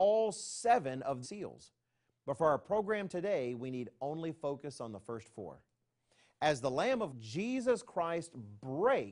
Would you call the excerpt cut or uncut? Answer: cut